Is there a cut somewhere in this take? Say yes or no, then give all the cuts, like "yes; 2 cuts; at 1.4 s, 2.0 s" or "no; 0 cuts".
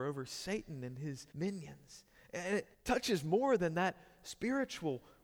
yes; 2 cuts; at 1.3 s, 2.7 s